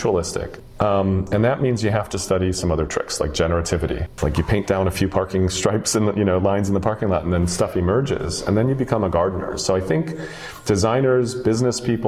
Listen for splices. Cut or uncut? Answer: uncut